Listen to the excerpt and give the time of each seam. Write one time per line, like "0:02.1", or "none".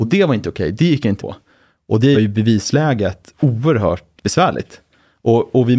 0:01.2
0:02.1
0:04.2